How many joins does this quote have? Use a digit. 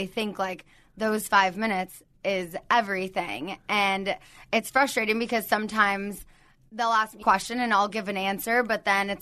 1